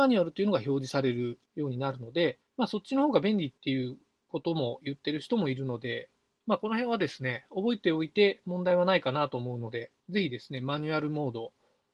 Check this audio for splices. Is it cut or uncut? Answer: cut